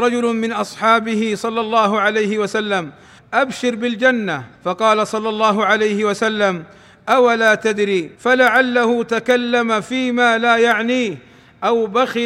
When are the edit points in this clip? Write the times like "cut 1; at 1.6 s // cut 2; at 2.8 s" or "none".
cut 1; at 3.2 s // cut 2; at 4.5 s // cut 3; at 8.1 s